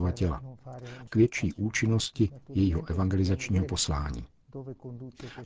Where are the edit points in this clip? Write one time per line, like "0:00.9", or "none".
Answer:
0:01.1